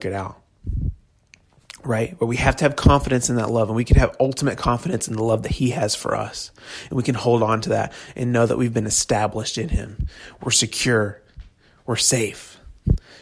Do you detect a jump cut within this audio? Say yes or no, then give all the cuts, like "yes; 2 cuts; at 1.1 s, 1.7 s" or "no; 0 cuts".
no; 0 cuts